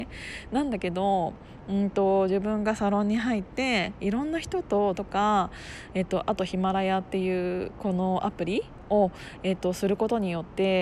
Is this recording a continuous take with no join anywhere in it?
no; 1 cut; at 4.9 s

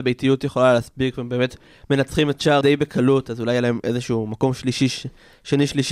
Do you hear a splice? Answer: yes; 1 cut; at 2.6 s

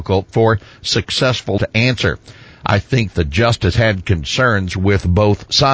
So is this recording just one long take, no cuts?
no; 3 cuts; at 1.6 s, 3.1 s, 3.7 s

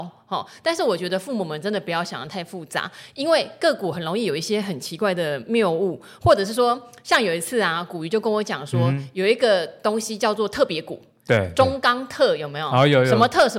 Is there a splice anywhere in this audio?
no; 0 cuts

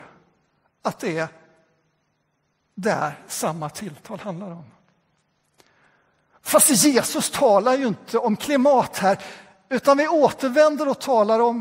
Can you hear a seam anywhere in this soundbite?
no; 0 cuts

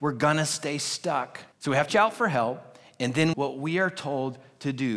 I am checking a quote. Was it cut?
yes; 3 cuts; at 1.5 s, 1.9 s, 3.3 s

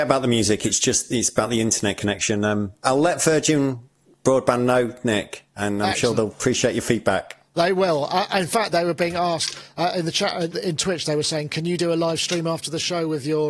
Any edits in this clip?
yes; 2 cuts; at 8.7 s, 10.5 s

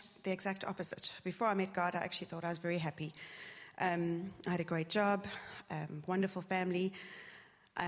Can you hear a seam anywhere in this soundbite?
no; 0 cuts

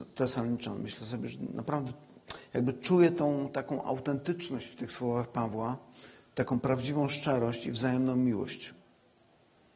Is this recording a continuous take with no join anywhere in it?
yes; 0 cuts

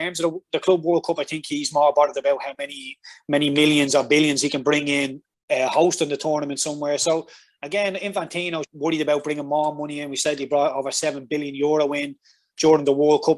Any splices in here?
yes; 1 cut; at 8.6 s

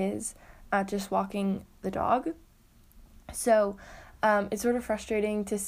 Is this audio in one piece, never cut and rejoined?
yes; 0 cuts

